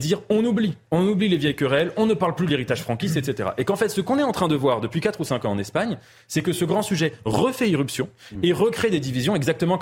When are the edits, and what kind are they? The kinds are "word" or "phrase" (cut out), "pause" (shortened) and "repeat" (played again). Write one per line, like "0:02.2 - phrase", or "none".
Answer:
none